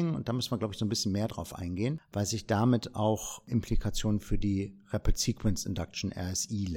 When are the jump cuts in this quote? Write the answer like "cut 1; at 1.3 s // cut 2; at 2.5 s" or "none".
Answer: none